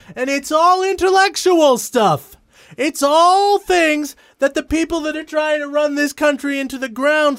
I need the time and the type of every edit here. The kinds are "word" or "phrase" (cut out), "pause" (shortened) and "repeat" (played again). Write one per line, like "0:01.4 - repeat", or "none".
none